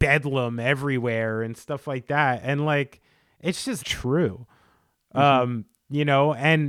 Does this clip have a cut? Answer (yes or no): yes